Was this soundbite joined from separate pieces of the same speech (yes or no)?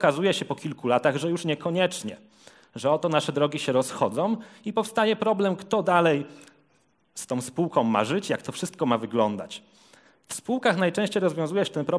no